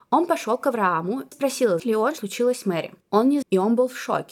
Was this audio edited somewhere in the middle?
yes; 5 cuts; at 1.3 s, 1.8 s, 2.2 s, 3.0 s, 3.4 s

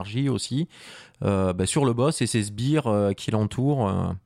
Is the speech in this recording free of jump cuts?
yes; 0 cuts

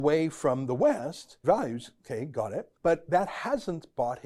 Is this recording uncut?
no; 3 cuts; at 1.4 s, 2.0 s, 2.7 s

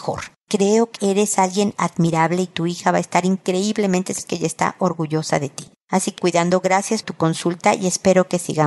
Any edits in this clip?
yes; 4 cuts; at 1.0 s, 4.2 s, 6.2 s, 7.0 s

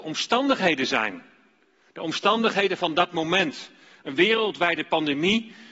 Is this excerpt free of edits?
yes; 0 cuts

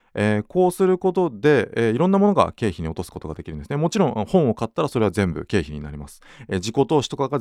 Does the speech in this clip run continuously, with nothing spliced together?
yes; 0 cuts

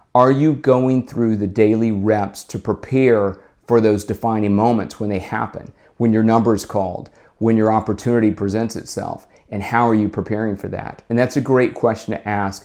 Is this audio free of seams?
yes; 0 cuts

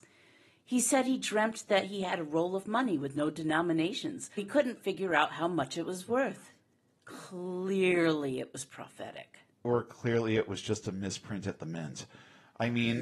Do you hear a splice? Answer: yes; 1 cut; at 4.4 s

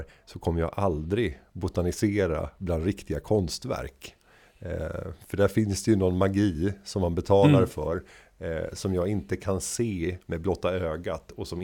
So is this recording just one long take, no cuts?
yes; 0 cuts

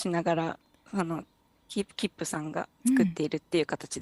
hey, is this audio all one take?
yes; 0 cuts

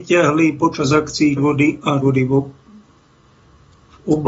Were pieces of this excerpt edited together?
yes; 2 cuts; at 1.4 s, 2.0 s

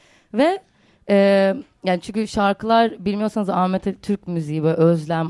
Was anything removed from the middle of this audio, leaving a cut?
no; 0 cuts

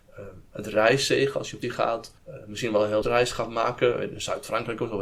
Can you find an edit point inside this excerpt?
yes; 3 cuts; at 1.6 s, 2.2 s, 3.0 s

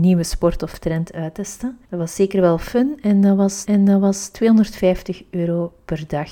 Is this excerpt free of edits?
no; 2 cuts; at 1.8 s, 3.7 s

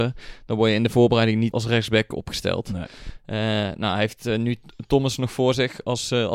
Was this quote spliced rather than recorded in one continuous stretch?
yes; 1 cut; at 1.5 s

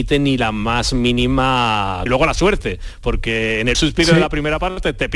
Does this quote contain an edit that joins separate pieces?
yes; 2 cuts; at 2.1 s, 3.7 s

